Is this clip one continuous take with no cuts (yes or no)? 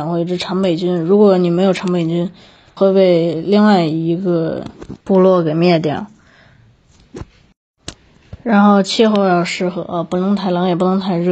no